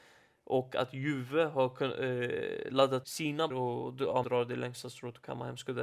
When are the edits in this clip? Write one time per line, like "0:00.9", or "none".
0:03.0
0:03.5
0:04.2